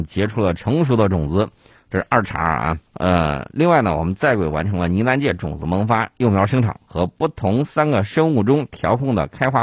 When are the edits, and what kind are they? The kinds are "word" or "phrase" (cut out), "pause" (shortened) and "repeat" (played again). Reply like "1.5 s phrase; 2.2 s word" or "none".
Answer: 2.9 s pause